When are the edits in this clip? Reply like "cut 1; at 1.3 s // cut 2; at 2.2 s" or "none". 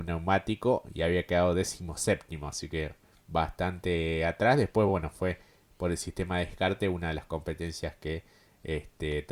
none